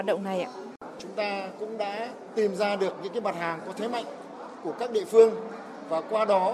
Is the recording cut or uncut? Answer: uncut